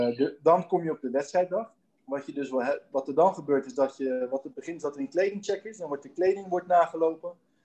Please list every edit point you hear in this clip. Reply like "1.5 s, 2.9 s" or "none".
1.8 s

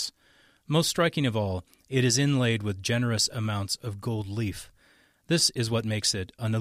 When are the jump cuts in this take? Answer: none

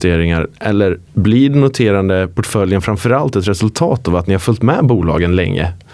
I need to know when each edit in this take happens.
1.1 s

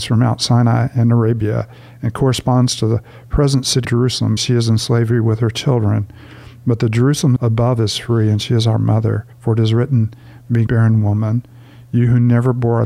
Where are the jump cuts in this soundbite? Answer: 3.8 s, 4.4 s, 7.4 s, 9.3 s, 10.7 s

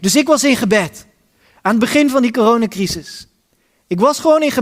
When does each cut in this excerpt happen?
none

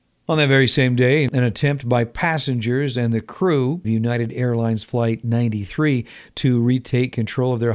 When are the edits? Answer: 3.8 s

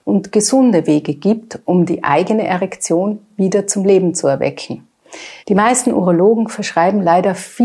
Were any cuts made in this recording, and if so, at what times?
5.4 s

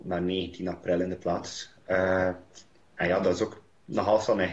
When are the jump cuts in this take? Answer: none

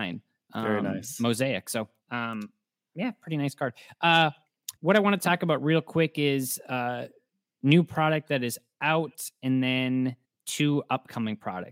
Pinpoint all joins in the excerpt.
4.8 s, 10.2 s

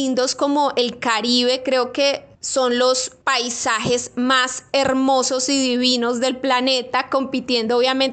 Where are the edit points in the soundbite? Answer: 2.3 s, 3.2 s

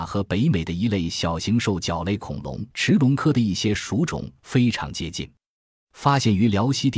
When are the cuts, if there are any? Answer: 2.7 s

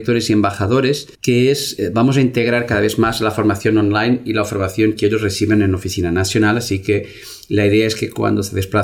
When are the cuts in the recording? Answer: 1.1 s

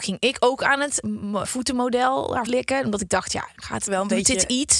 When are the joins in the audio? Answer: 1.0 s, 1.4 s, 2.5 s

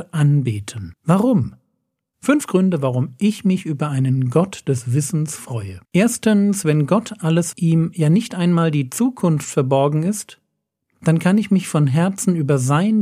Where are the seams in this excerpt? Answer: 1.0 s, 5.8 s, 7.5 s

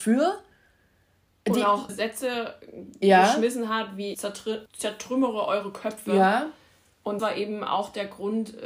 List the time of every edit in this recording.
1.9 s, 4.1 s, 4.7 s, 7.2 s

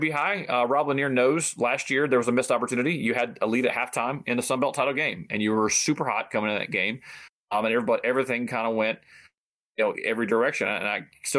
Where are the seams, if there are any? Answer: none

